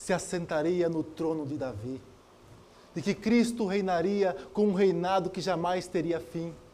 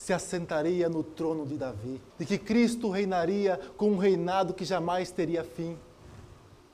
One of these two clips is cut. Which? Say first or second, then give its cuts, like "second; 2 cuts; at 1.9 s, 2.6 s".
second; 1 cut; at 2.1 s